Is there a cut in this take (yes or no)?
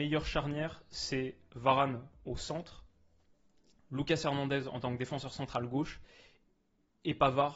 no